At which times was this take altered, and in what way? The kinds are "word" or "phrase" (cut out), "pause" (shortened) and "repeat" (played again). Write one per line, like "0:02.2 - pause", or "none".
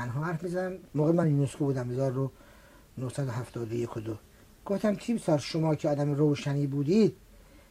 none